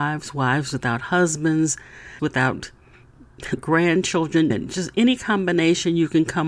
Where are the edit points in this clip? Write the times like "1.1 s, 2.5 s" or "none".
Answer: 2.2 s, 3.6 s, 4.5 s